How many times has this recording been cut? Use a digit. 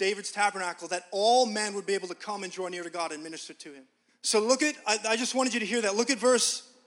1